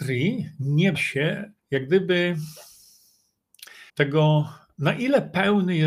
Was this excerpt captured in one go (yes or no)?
no